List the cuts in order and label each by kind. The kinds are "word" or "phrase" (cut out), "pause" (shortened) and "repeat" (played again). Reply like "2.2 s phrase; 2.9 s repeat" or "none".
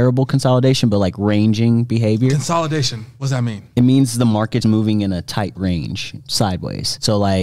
4.6 s word